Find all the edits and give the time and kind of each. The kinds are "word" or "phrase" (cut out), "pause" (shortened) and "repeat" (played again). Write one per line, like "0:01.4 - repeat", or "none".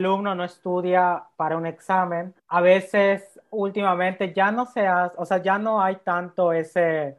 0:02.4 - pause

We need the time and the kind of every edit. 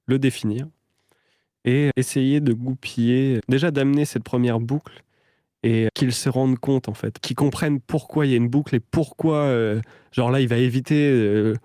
0:01.9 - word
0:03.4 - word
0:05.9 - word

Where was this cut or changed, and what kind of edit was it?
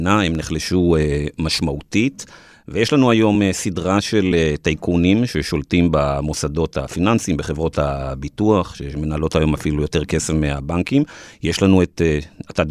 none

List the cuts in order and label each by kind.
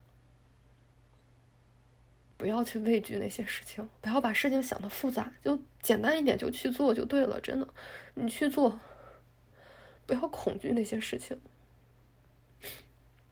0:04.0 - pause
0:10.0 - pause

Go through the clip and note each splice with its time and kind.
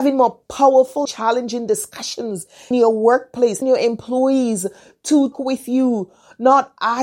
0:01.0 - word
0:02.7 - word
0:03.6 - word
0:05.3 - word

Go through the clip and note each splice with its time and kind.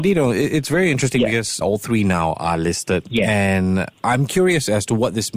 0:01.6 - phrase

